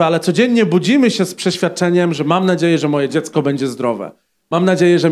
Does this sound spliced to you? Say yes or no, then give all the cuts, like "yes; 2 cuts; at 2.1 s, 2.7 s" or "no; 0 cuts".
no; 0 cuts